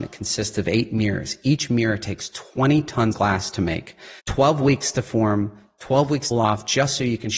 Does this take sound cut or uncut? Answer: cut